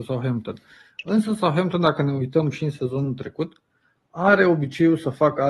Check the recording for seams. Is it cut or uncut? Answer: uncut